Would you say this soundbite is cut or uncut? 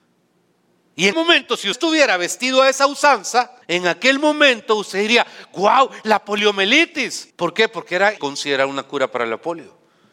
cut